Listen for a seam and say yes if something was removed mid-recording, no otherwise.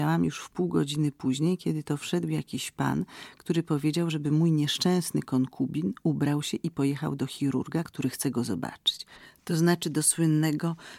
no